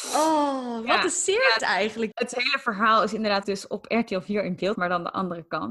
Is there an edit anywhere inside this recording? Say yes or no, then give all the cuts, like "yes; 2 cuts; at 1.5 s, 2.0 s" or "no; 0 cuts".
yes; 4 cuts; at 1.6 s, 2.1 s, 3.4 s, 4.8 s